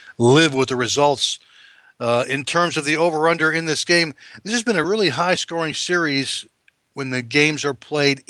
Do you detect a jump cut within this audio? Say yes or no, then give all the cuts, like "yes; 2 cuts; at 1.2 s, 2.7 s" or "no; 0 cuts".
no; 0 cuts